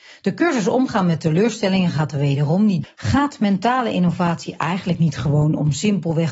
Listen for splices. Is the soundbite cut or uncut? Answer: cut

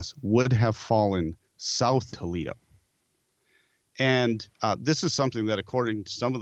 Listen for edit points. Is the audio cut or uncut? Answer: cut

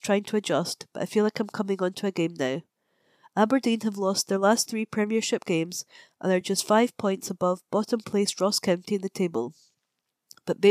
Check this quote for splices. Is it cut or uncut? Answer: uncut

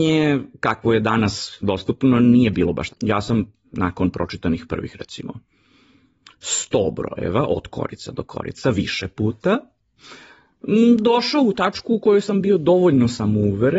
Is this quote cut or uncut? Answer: cut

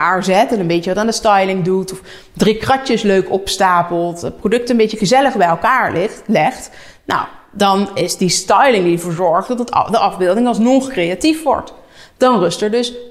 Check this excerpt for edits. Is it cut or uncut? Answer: uncut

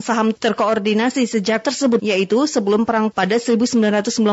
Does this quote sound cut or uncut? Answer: cut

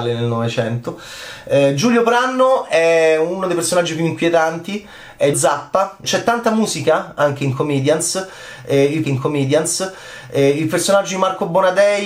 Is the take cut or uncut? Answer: cut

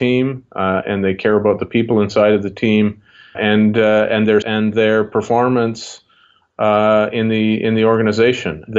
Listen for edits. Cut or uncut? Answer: cut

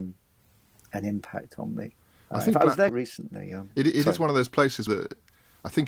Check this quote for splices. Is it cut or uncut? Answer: cut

